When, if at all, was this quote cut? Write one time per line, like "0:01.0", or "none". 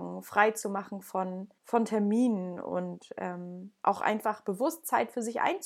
0:01.6